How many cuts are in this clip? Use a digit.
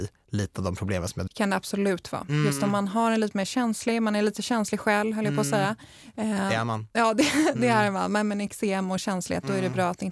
1